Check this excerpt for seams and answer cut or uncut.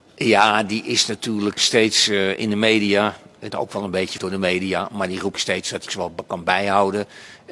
cut